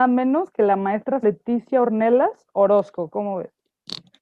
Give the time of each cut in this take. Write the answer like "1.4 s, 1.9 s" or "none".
1.2 s